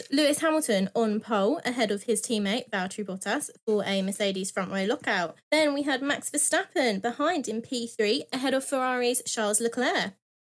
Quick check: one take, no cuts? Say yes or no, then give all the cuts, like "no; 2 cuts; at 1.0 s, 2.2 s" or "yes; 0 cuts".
no; 1 cut; at 5.4 s